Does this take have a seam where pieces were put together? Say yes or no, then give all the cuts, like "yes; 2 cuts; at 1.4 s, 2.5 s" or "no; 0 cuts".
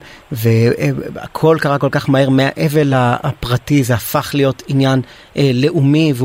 no; 0 cuts